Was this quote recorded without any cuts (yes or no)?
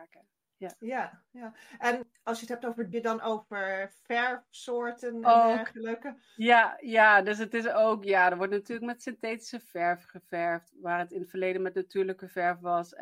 no